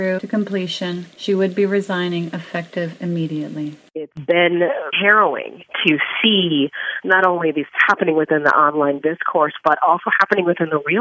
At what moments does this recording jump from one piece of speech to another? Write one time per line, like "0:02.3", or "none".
0:04.9
0:09.6